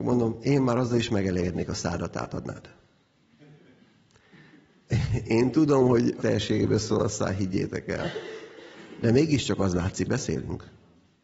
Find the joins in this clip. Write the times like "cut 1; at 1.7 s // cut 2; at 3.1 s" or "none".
cut 1; at 6.2 s // cut 2; at 10.1 s